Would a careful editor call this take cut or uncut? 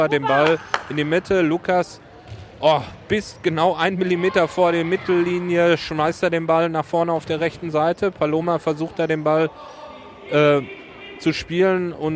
uncut